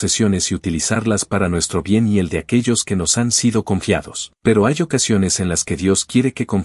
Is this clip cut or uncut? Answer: cut